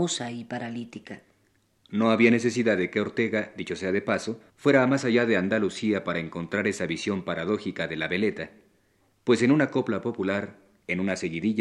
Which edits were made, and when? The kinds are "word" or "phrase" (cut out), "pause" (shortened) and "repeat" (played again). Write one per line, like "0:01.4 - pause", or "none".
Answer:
0:04.5 - pause